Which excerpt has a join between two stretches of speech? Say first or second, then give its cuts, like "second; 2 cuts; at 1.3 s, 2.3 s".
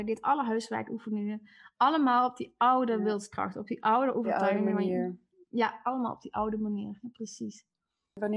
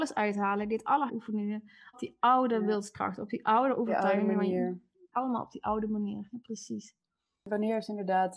second; 3 cuts; at 1.1 s, 1.9 s, 5.1 s